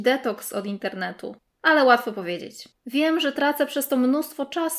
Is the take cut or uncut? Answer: cut